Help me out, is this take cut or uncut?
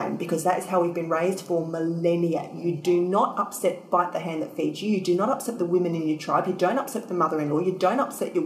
uncut